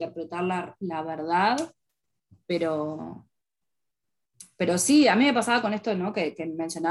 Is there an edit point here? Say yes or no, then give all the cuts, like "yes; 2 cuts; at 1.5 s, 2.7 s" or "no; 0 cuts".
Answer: no; 0 cuts